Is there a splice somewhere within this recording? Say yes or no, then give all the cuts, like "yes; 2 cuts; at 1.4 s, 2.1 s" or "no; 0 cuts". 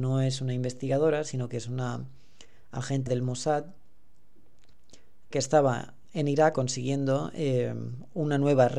yes; 4 cuts; at 3.1 s, 5.3 s, 6.0 s, 6.5 s